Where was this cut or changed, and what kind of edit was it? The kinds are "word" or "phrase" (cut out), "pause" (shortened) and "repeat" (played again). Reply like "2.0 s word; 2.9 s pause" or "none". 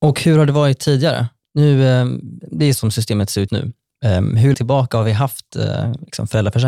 2.7 s word; 3.5 s word; 4.5 s word